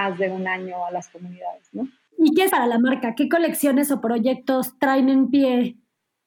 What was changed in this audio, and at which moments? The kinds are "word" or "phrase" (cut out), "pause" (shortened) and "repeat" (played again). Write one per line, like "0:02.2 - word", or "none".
0:02.5 - word

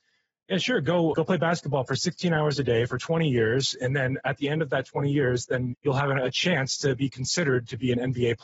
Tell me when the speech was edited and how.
0:01.1 - word
0:05.7 - word

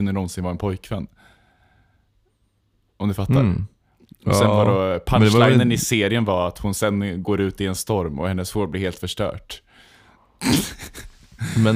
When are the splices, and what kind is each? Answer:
none

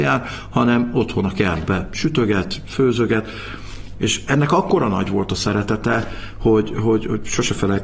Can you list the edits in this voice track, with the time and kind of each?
none

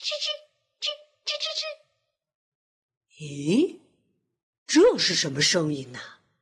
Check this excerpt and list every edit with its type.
none

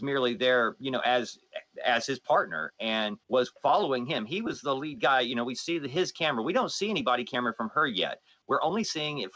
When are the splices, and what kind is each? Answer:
0:03.2 - pause

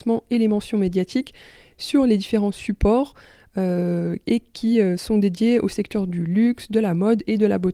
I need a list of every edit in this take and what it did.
none

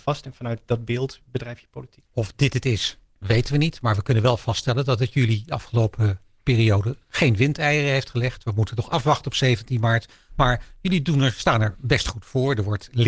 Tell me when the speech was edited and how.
0:02.1 - pause

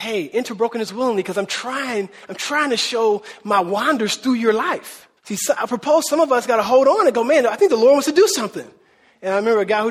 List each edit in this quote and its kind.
0:05.2 - pause
0:05.6 - word

